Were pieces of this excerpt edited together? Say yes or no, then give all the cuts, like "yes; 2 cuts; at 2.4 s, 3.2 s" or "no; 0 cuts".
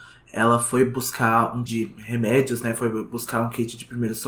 yes; 1 cut; at 1.7 s